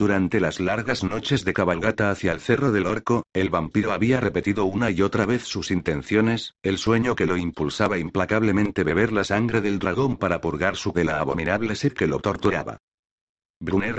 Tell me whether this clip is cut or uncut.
cut